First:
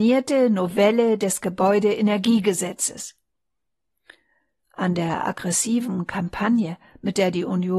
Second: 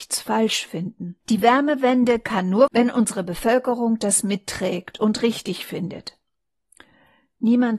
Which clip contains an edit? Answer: second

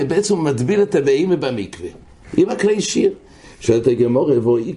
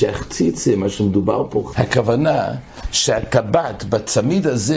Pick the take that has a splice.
second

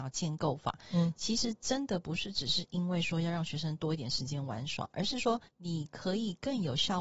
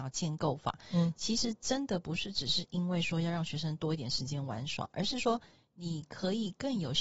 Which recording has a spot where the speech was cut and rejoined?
first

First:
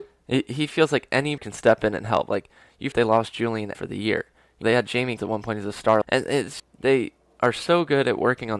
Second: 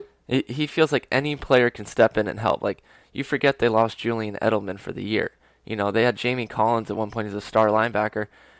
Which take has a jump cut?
first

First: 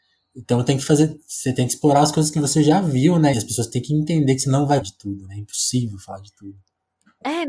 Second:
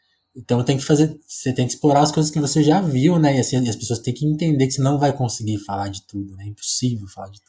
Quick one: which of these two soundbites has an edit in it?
first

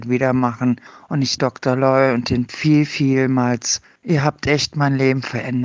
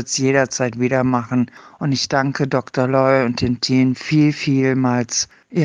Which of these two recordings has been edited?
first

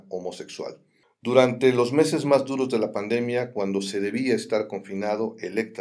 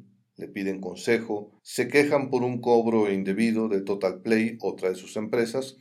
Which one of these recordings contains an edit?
second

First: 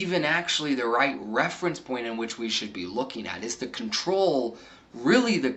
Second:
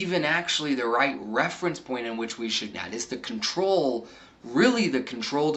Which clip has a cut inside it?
second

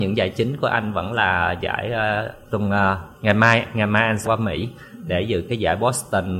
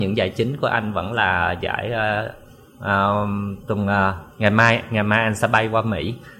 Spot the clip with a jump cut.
first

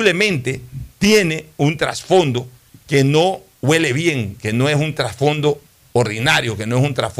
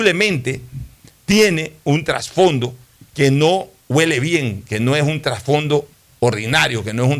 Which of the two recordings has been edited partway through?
first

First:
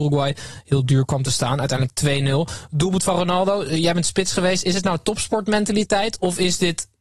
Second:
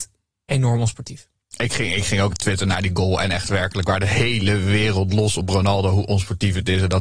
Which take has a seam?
second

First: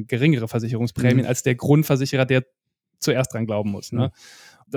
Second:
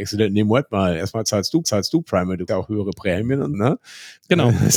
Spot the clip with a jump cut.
second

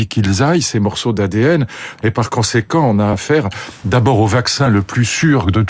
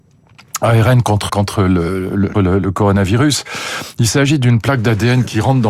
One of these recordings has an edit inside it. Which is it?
second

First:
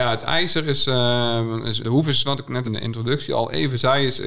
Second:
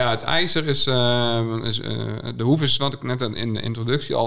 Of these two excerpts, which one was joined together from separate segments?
first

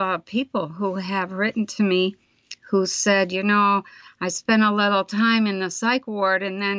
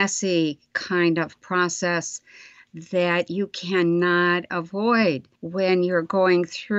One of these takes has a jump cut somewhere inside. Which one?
second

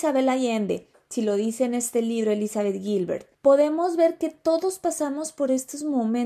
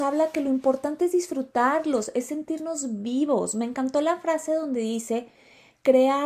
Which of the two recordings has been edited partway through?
first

